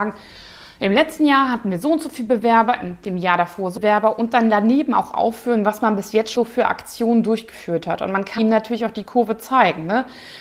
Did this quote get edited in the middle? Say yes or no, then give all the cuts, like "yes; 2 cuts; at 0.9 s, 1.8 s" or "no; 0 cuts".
yes; 3 cuts; at 3.8 s, 6.3 s, 8.4 s